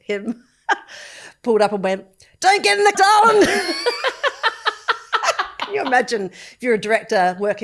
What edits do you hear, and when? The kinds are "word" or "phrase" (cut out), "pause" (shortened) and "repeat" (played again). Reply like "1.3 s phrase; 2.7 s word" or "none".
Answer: 2.9 s word